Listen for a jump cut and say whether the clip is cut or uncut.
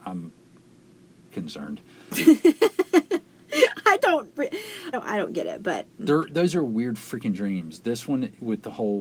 cut